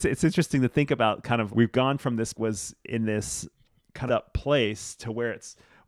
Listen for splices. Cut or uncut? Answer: cut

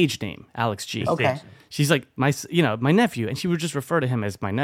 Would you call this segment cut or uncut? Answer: uncut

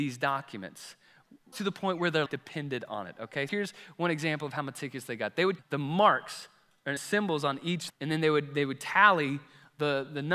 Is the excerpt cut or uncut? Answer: cut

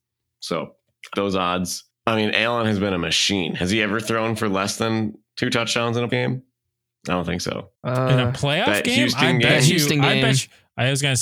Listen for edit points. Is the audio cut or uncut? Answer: cut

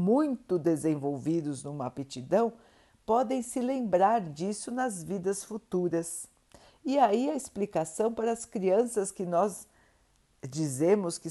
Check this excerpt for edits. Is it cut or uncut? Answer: uncut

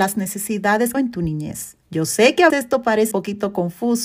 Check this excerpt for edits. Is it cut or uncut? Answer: cut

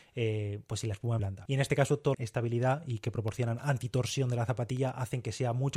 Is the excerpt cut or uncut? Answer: cut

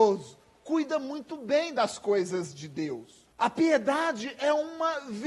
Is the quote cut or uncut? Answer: cut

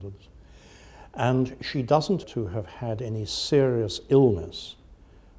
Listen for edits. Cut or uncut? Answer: cut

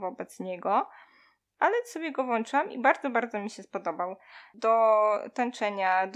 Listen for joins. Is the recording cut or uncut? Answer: uncut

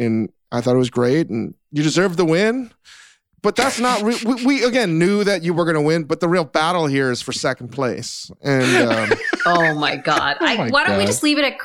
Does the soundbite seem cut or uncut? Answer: uncut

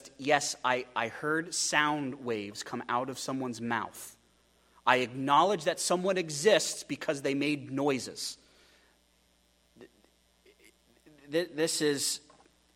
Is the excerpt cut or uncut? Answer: uncut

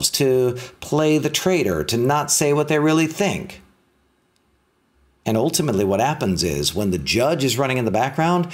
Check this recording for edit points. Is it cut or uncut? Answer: uncut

